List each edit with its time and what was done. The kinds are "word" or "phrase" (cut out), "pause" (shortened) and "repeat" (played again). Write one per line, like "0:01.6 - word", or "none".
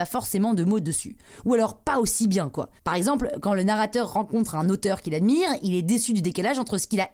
0:02.8 - pause